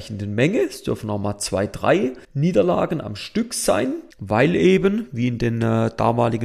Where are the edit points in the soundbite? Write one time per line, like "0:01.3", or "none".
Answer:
0:02.2
0:04.1